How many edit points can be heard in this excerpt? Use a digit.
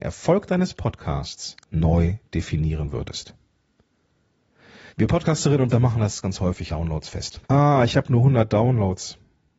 6